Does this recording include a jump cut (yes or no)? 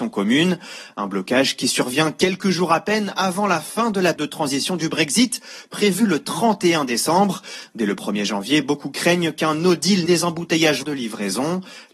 yes